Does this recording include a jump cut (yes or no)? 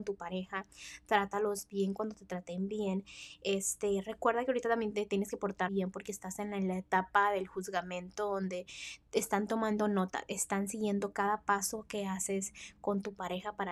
yes